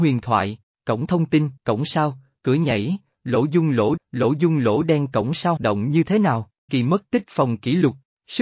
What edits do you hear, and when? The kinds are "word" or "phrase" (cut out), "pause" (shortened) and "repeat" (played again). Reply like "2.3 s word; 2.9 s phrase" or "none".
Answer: 1.6 s pause; 4.0 s repeat; 5.6 s word; 6.7 s word